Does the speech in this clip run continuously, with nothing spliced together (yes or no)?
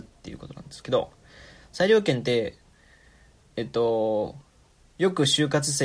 yes